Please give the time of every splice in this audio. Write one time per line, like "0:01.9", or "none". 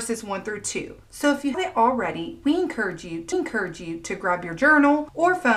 0:01.5
0:03.3